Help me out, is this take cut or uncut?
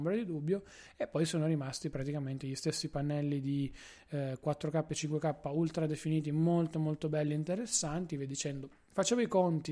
uncut